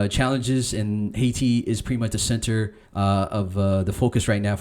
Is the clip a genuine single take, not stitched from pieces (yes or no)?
no